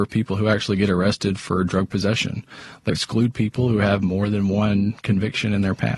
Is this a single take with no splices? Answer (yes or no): no